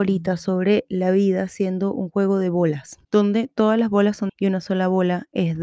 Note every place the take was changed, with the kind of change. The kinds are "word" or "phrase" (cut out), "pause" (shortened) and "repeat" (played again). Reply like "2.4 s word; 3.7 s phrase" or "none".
3.0 s pause; 4.3 s phrase

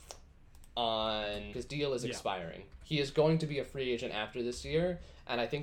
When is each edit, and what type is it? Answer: 1.5 s word

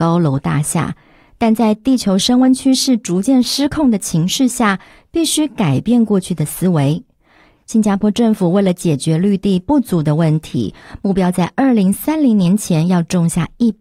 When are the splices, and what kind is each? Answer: none

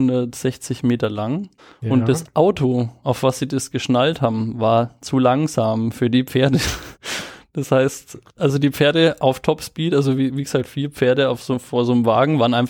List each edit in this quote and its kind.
1.6 s pause; 7.0 s pause; 8.3 s pause

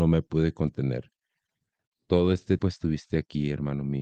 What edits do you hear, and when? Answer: 2.6 s word

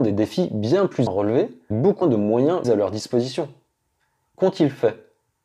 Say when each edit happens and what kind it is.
1.1 s word; 1.7 s word; 2.0 s word; 2.6 s word

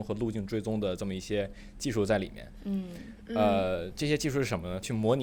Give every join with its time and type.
none

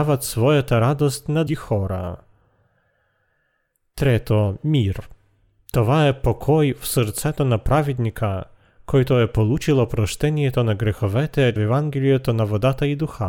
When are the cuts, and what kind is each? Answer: 1.5 s word; 11.6 s phrase

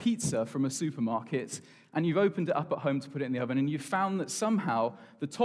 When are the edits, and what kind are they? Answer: none

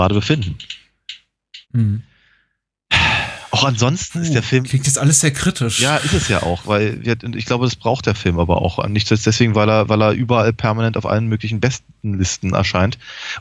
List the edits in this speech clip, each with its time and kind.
1.6 s pause

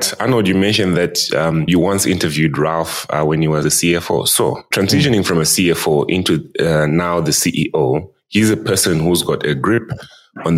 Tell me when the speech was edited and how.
3.6 s word

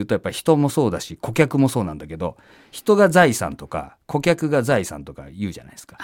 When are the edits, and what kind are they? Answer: none

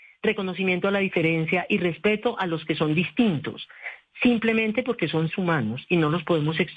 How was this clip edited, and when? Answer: 5.3 s word

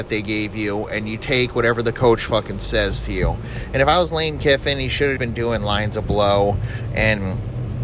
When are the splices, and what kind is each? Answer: 1.2 s word; 5.2 s word

